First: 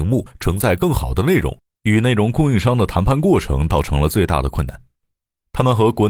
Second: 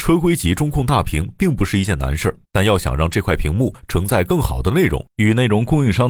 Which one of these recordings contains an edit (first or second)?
second